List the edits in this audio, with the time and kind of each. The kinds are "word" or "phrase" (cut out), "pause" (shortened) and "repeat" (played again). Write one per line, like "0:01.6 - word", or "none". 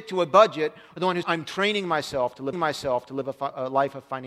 0:01.2 - word
0:02.5 - repeat